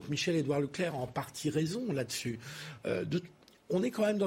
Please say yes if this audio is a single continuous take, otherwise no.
yes